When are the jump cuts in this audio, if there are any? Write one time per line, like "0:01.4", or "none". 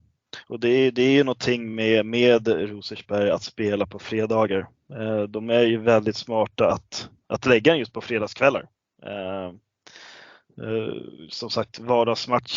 none

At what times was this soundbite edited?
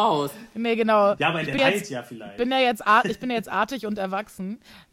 0:01.6

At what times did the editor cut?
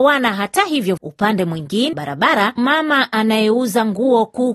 0:01.0
0:01.9
0:02.6

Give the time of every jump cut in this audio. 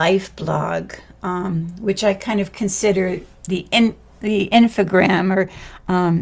none

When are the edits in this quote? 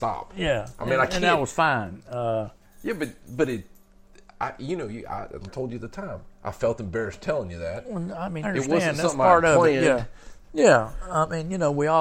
0:05.5
0:08.4

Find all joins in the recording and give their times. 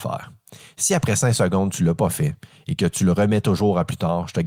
none

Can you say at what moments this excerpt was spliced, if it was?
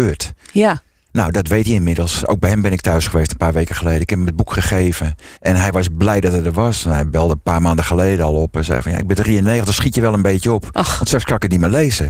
0:05.4

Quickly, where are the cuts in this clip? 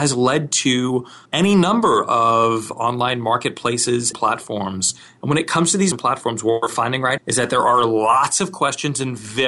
0:01.3
0:04.1
0:05.9
0:07.2

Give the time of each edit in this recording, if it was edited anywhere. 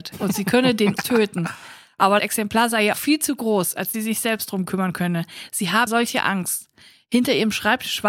0:01.0
0:02.2
0:02.9
0:03.9
0:05.9

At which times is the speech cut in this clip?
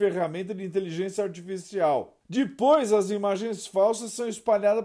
0:02.2

